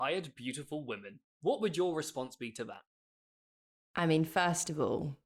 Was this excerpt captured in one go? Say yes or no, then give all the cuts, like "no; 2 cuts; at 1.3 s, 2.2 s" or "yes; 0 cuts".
yes; 0 cuts